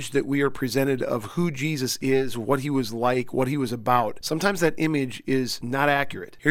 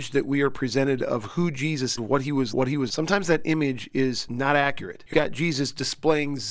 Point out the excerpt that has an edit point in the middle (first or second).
second